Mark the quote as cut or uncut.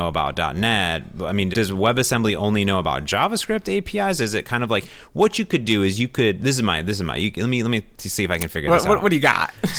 cut